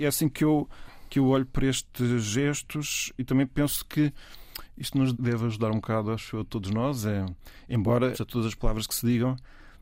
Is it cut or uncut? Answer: cut